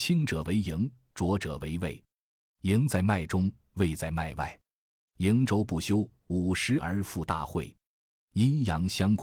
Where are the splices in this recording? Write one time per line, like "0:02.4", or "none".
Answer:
none